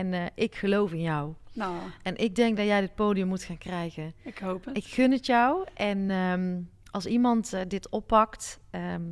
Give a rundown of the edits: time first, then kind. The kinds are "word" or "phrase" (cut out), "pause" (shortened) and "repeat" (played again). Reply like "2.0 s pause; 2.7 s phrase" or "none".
none